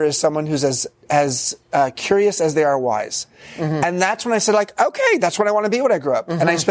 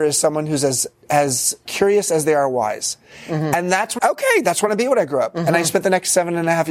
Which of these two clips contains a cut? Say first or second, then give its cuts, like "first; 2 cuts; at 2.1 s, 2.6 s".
second; 3 cuts; at 1.6 s, 4.0 s, 4.7 s